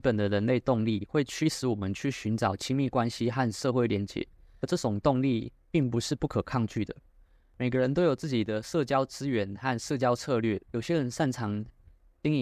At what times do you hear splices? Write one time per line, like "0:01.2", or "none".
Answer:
none